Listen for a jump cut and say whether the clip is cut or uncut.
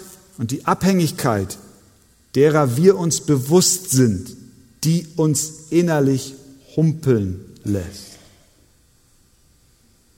uncut